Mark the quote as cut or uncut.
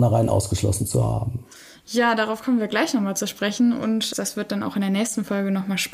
uncut